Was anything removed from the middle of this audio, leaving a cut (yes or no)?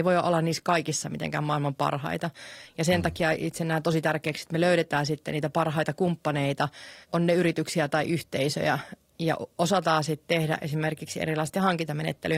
yes